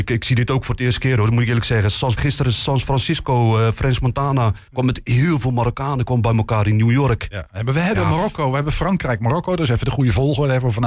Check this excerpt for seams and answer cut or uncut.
cut